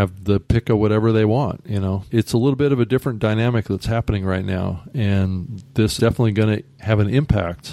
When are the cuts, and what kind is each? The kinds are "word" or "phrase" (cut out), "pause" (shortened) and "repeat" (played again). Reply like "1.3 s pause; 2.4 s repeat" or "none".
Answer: 6.0 s word